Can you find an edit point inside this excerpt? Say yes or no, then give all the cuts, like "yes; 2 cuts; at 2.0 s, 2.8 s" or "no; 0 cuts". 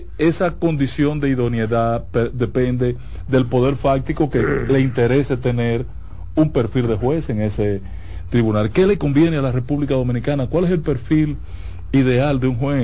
no; 0 cuts